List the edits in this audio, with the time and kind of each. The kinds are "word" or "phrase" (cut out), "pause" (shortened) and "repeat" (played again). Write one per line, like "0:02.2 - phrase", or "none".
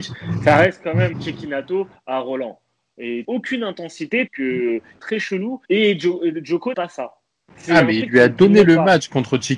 0:01.1 - word
0:03.2 - phrase
0:04.3 - phrase
0:05.0 - phrase
0:05.6 - pause
0:06.7 - word